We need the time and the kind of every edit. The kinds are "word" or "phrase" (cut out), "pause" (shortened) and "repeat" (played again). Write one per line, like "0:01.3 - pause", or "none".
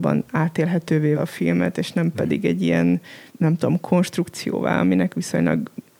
0:01.2 - word
0:03.3 - pause